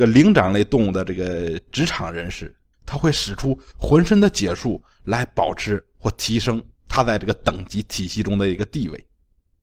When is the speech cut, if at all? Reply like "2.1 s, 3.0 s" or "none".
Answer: 2.7 s